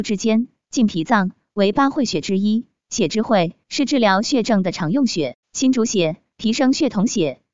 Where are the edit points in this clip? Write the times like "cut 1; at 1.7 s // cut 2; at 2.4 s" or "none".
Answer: cut 1; at 5.4 s